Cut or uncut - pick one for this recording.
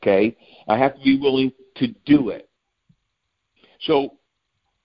uncut